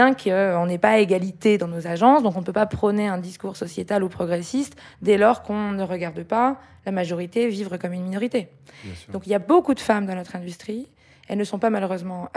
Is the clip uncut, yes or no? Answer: yes